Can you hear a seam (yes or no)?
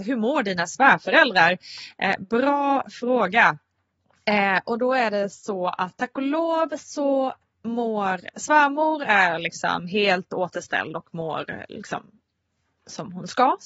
no